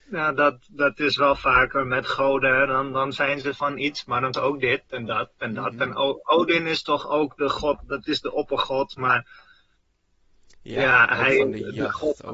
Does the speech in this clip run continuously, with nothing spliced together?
no; 1 cut; at 4.3 s

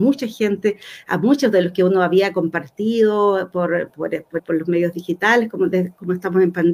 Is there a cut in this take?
yes; 1 cut; at 4.4 s

